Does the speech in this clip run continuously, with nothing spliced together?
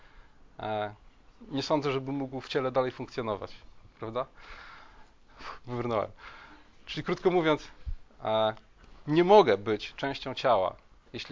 yes; 0 cuts

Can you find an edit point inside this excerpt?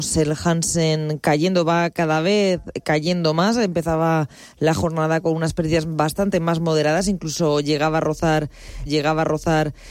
yes; 1 cut; at 8.9 s

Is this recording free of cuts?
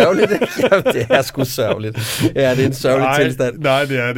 yes; 0 cuts

